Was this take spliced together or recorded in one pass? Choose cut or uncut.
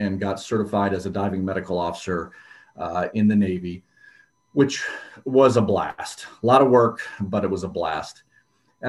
uncut